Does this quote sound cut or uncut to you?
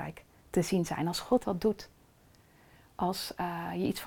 cut